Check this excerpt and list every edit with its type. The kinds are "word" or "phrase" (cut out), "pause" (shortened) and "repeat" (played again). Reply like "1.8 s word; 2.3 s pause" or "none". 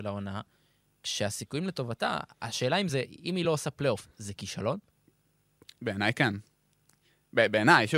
none